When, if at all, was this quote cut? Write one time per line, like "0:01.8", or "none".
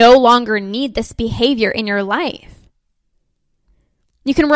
none